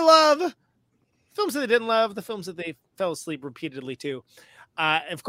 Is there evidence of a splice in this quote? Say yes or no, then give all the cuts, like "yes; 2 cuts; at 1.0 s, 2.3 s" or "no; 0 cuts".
no; 0 cuts